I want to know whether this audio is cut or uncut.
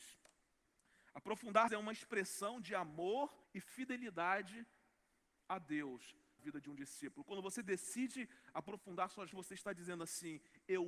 cut